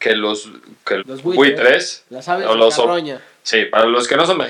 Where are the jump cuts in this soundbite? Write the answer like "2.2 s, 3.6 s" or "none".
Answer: 1.0 s